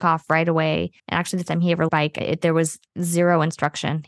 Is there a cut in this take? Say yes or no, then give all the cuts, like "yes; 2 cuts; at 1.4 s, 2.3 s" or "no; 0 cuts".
yes; 4 cuts; at 1.0 s, 1.5 s, 1.9 s, 2.2 s